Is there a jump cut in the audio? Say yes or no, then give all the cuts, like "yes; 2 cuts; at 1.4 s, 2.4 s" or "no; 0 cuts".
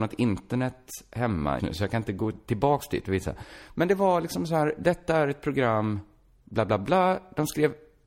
yes; 1 cut; at 1.6 s